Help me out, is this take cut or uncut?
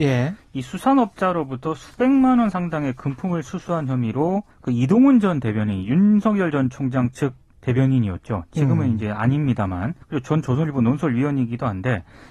cut